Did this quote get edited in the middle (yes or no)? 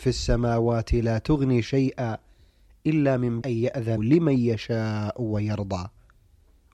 yes